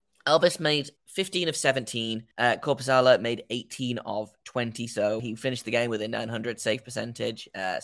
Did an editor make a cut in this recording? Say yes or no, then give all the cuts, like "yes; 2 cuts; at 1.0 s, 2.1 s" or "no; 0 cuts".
yes; 3 cuts; at 1.0 s, 2.3 s, 5.2 s